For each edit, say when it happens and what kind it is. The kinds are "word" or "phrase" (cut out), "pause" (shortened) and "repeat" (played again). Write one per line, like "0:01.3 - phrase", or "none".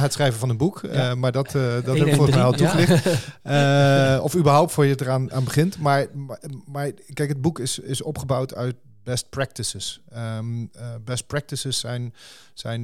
none